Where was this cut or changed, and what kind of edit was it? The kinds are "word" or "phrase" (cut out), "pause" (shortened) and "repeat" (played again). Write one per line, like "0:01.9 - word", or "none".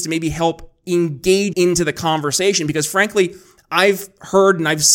0:01.5 - word